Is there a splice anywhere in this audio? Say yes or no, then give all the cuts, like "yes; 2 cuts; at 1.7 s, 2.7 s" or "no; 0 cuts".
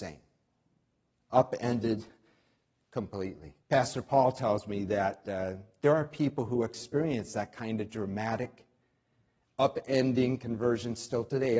yes; 1 cut; at 3.6 s